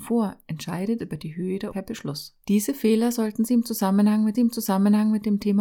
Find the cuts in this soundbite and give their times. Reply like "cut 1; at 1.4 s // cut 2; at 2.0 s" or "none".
cut 1; at 1.0 s // cut 2; at 1.7 s // cut 3; at 2.4 s // cut 4; at 4.3 s